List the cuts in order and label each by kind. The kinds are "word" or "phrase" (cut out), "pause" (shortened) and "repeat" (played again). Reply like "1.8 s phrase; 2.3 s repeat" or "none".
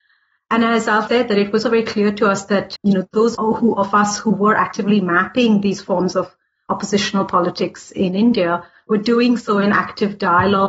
1.1 s word; 1.6 s word; 2.8 s word; 3.3 s word